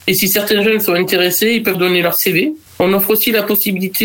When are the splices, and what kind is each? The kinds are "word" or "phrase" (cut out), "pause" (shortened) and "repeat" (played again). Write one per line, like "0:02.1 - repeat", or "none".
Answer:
0:01.7 - word
0:02.7 - pause